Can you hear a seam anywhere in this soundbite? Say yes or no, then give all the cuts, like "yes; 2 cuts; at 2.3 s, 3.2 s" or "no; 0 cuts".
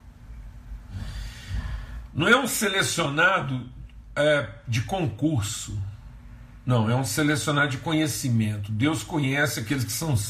no; 0 cuts